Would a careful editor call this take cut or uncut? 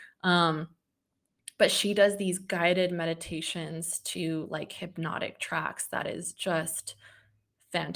uncut